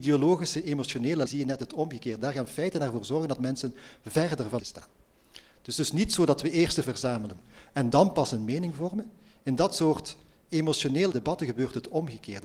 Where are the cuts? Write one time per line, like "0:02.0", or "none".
0:01.3
0:04.6
0:06.8
0:11.1